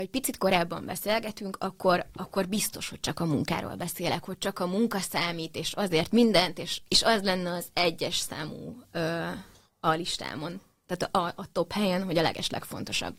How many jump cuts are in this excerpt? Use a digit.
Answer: 1